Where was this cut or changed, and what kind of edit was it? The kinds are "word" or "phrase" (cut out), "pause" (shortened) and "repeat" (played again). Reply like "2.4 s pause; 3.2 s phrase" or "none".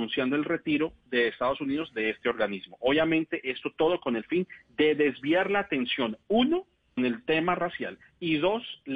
7.0 s word